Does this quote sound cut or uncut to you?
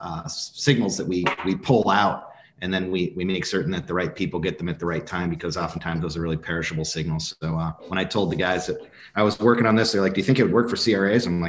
uncut